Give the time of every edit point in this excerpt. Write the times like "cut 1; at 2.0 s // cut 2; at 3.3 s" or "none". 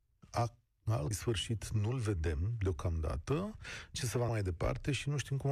cut 1; at 1.1 s // cut 2; at 3.9 s // cut 3; at 4.3 s

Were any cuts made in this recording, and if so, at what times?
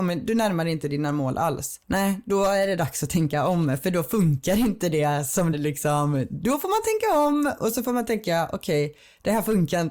cut 1; at 1.8 s // cut 2; at 5.5 s

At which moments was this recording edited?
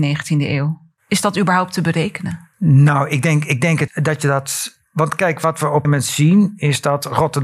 cut 1; at 2.5 s // cut 2; at 3.9 s // cut 3; at 5.8 s

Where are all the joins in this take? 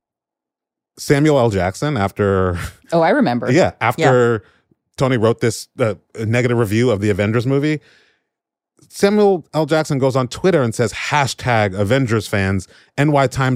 none

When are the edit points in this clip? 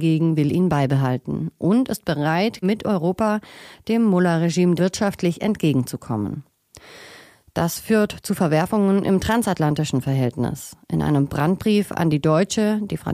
cut 1; at 2.6 s // cut 2; at 4.8 s

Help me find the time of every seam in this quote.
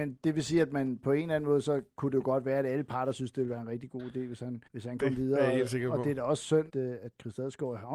cut 1; at 4.7 s // cut 2; at 6.7 s

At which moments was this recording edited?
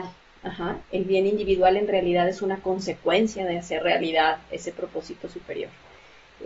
none

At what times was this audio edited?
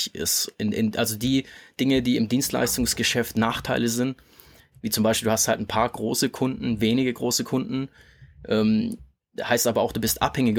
none

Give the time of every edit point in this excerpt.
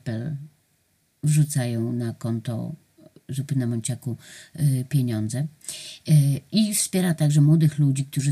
none

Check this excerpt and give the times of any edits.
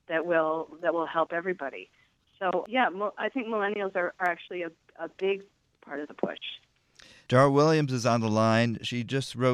none

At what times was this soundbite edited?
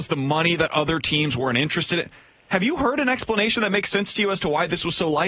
none

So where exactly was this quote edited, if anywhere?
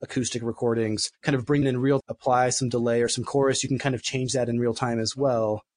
cut 1; at 1.1 s // cut 2; at 1.6 s // cut 3; at 2.0 s

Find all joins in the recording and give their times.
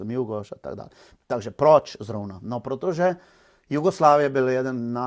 none

